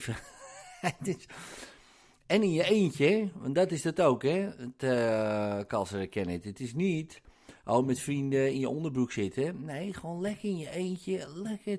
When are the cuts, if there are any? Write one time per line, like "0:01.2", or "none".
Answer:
none